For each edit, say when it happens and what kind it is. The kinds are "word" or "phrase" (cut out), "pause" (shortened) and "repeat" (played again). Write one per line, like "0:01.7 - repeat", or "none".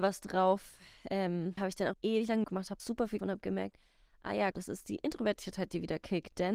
0:01.6 - word
0:01.9 - word
0:02.4 - word
0:02.8 - word
0:03.2 - word
0:04.5 - word